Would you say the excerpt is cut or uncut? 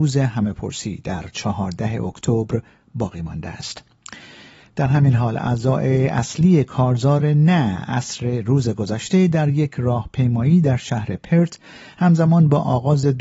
uncut